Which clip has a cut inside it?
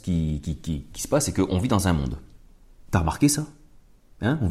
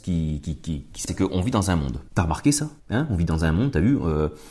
second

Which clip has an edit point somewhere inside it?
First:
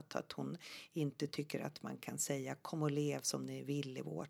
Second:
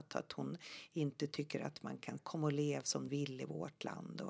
second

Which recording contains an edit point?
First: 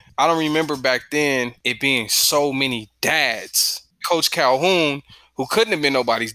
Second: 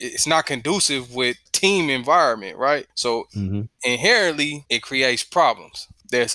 second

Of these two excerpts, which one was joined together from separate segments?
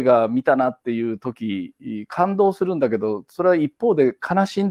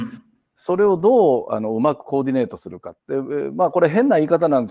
second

